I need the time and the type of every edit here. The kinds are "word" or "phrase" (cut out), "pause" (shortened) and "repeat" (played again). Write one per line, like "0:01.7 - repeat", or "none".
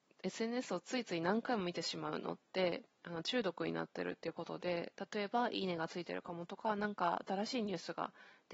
0:02.9 - pause

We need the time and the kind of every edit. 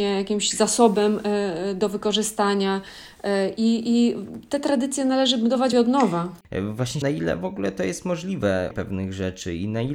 0:05.7 - word
0:07.0 - phrase
0:08.7 - word

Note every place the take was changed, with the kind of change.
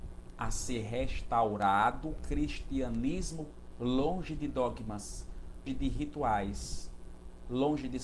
0:03.7 - word
0:05.7 - word

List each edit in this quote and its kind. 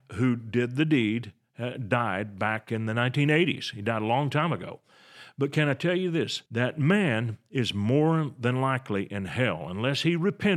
0:06.5 - pause

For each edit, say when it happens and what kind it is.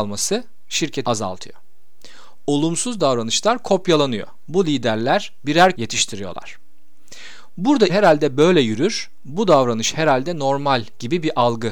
0:01.0 - word
0:05.8 - phrase
0:07.9 - word

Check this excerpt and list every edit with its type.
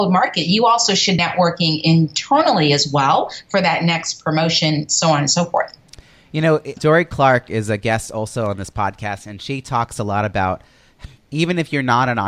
0:01.2 - word
0:06.8 - word

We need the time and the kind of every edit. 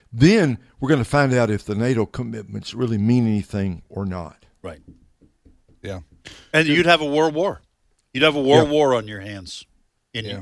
none

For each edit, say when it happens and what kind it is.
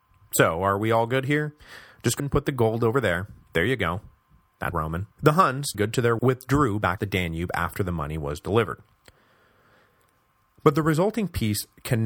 0:02.2 - word
0:03.4 - pause
0:04.7 - phrase
0:05.1 - pause
0:05.7 - word
0:06.2 - word
0:07.0 - word

